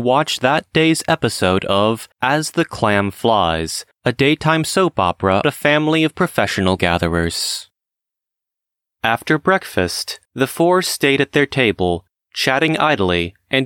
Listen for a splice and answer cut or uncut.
cut